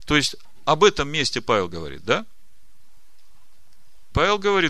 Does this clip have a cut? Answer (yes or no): no